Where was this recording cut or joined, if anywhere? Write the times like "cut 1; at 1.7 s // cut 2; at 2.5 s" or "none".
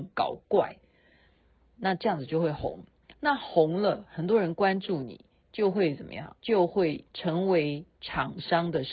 cut 1; at 3.1 s // cut 2; at 6.4 s // cut 3; at 7.1 s // cut 4; at 7.9 s